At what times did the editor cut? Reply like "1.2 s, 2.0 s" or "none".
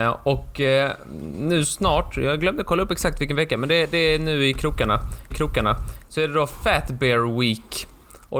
5.3 s